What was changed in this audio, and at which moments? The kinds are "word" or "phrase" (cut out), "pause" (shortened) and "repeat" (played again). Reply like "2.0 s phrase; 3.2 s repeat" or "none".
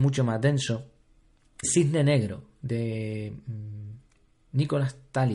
1.6 s word